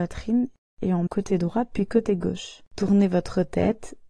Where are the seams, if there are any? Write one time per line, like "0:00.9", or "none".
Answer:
0:01.1
0:02.7